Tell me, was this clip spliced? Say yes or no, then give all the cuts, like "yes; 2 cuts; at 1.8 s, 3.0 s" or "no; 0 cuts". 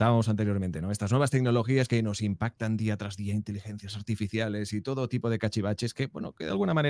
no; 0 cuts